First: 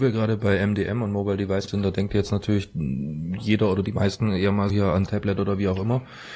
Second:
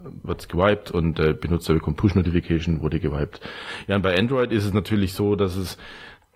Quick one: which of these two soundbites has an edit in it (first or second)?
first